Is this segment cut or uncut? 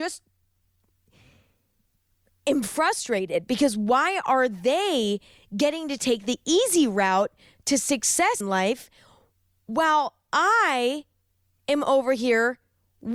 cut